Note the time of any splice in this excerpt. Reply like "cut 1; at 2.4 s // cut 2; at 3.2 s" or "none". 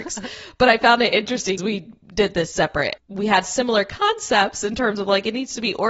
cut 1; at 1.6 s // cut 2; at 3.0 s